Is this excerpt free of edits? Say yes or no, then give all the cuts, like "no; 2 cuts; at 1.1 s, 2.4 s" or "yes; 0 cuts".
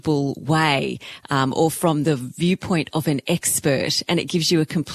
yes; 0 cuts